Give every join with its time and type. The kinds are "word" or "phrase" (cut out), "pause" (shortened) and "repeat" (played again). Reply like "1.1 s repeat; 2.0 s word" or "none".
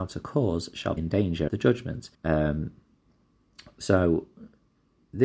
1.0 s word; 1.5 s word; 2.1 s pause